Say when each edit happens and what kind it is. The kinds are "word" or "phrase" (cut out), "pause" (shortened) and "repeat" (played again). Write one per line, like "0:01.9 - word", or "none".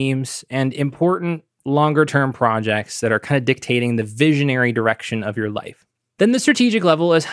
none

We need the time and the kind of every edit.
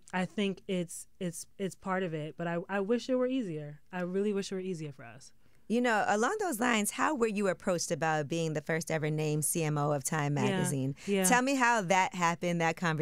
none

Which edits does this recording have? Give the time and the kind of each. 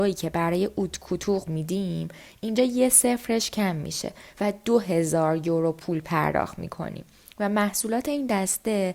0:01.5 - word

